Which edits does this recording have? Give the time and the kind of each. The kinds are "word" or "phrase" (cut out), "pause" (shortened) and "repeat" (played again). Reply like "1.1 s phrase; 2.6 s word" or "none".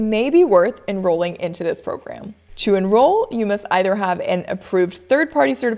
none